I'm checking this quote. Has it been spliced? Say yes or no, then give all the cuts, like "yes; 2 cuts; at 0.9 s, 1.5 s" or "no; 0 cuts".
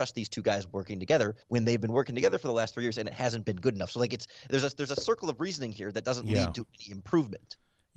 yes; 1 cut; at 1.4 s